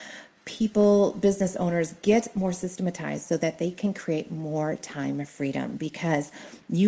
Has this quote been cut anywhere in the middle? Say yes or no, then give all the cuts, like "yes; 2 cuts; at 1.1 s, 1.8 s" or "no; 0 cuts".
no; 0 cuts